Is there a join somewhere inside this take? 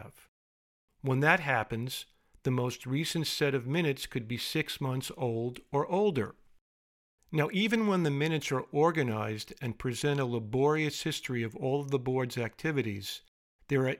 no; 0 cuts

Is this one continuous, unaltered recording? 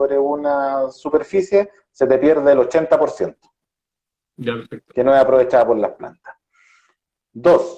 yes; 0 cuts

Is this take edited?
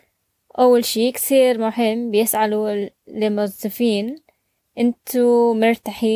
no; 0 cuts

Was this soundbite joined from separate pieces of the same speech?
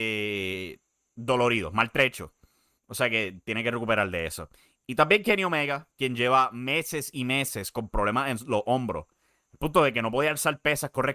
no; 0 cuts

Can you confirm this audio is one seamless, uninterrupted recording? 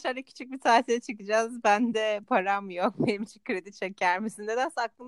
yes; 0 cuts

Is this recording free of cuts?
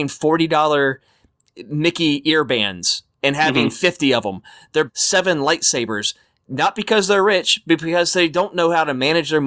no; 1 cut; at 4.9 s

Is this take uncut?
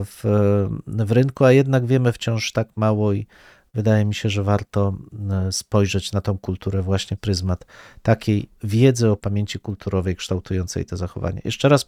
no; 3 cuts; at 7.2 s, 8.6 s, 9.2 s

